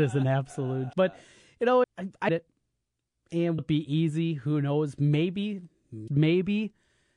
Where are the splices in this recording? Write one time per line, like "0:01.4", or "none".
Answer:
0:00.9
0:01.8
0:02.3
0:03.6
0:06.1